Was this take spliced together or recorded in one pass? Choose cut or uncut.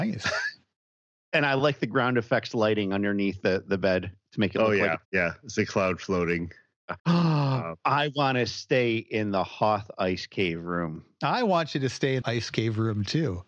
cut